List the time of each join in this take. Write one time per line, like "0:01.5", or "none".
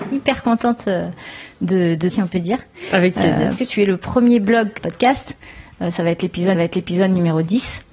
0:02.1
0:03.6
0:04.8
0:06.5